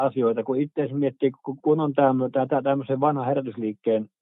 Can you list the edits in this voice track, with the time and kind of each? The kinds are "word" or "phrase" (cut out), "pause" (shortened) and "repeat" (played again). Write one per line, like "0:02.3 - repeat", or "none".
0:01.6 - pause